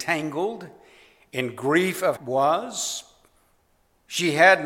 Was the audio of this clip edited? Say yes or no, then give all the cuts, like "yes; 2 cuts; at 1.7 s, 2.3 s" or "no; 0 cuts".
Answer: yes; 1 cut; at 2.2 s